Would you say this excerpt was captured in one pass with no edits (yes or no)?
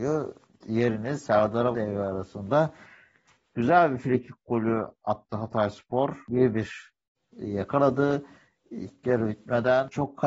no